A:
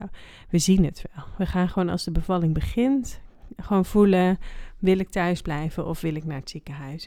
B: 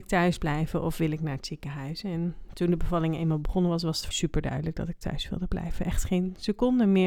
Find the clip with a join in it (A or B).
B